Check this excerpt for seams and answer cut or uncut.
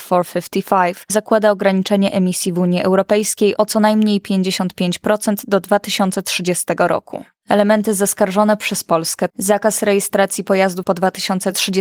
cut